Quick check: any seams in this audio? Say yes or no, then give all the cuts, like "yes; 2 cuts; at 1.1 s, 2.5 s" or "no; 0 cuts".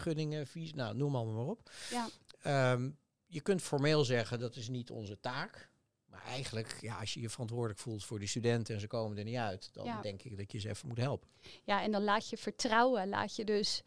no; 0 cuts